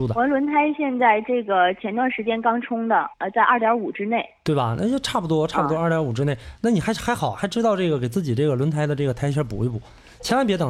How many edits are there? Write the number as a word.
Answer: one